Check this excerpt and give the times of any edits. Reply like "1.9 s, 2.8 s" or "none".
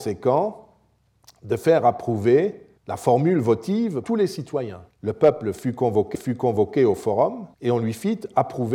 2.8 s, 4.0 s, 4.9 s, 6.1 s, 7.5 s